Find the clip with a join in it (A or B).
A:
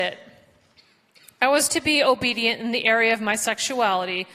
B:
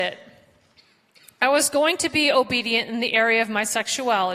A